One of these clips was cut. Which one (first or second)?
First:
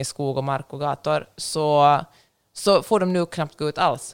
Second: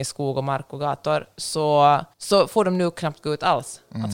second